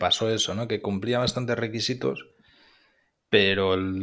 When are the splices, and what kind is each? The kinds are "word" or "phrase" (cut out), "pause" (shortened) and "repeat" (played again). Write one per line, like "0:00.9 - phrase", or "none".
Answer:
none